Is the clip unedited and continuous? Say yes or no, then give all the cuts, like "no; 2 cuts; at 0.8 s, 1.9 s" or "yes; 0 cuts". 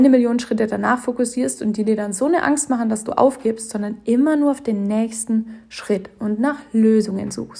yes; 0 cuts